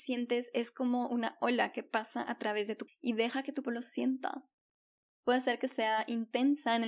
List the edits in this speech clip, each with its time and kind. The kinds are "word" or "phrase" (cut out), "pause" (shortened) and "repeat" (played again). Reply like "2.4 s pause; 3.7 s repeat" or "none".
2.9 s word; 3.6 s word